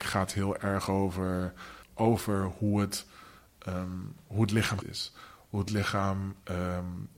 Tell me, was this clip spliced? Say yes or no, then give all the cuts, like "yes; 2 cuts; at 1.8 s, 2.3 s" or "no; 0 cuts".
yes; 2 cuts; at 1.8 s, 4.8 s